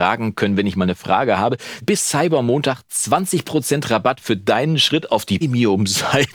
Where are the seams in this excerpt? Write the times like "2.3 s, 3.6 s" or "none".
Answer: 1.8 s, 5.4 s